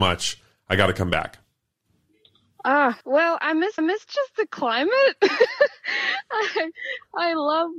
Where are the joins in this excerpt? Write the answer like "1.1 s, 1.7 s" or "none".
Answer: 3.0 s, 3.8 s